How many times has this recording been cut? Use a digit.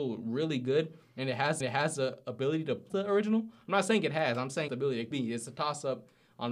4